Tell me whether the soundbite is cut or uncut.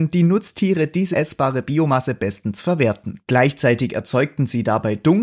cut